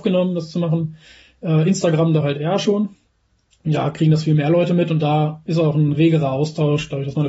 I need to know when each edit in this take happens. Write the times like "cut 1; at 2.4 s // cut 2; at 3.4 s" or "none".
none

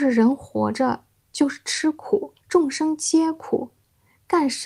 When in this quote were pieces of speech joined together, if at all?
cut 1; at 2.4 s

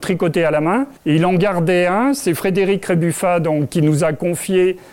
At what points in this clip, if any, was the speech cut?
cut 1; at 1.0 s // cut 2; at 3.7 s

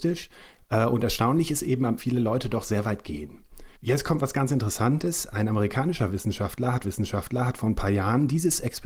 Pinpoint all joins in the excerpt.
cut 1; at 2.0 s // cut 2; at 3.8 s // cut 3; at 6.8 s

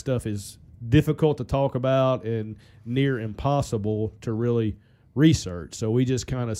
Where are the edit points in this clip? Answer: none

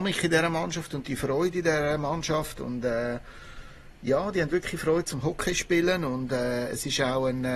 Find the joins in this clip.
none

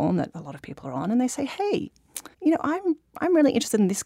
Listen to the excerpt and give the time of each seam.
cut 1; at 2.3 s

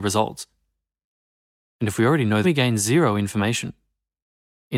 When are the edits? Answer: cut 1; at 2.4 s

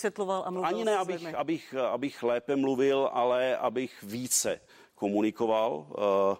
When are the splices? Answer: none

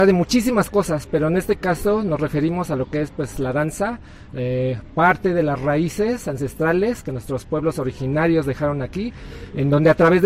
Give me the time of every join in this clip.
none

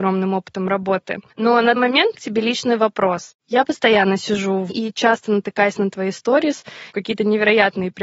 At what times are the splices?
cut 1; at 1.3 s // cut 2; at 1.8 s // cut 3; at 2.1 s // cut 4; at 4.7 s // cut 5; at 6.9 s

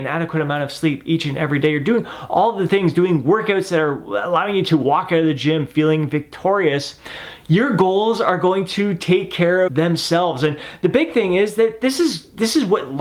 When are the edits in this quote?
cut 1; at 9.7 s

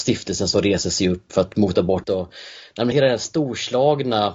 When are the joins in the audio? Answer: cut 1; at 1.3 s // cut 2; at 2.0 s // cut 3; at 2.9 s

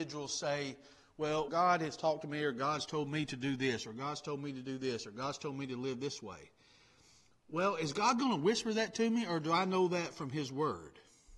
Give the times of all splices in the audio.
cut 1; at 1.5 s

